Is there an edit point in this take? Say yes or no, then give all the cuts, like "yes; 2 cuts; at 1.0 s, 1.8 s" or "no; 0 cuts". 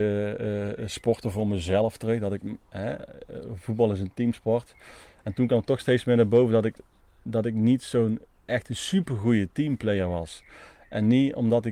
no; 0 cuts